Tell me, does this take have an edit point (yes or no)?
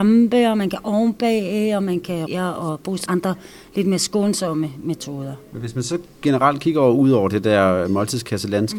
yes